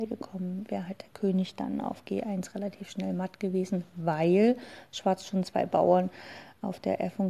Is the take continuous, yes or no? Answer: yes